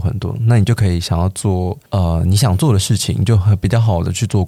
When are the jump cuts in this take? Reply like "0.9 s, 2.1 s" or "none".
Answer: 1.9 s